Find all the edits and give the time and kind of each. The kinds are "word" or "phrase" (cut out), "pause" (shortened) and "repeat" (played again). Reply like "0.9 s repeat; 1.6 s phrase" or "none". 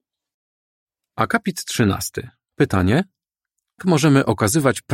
3.8 s word